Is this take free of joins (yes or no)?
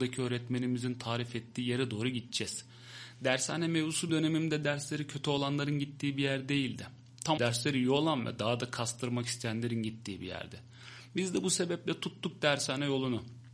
no